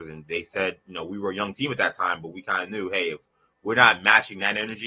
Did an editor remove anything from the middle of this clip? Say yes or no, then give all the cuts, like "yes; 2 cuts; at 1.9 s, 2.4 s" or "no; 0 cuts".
no; 0 cuts